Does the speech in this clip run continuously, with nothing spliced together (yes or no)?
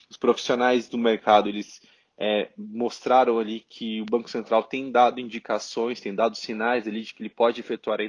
yes